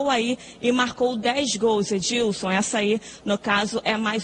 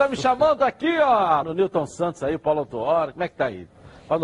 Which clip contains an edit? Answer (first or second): second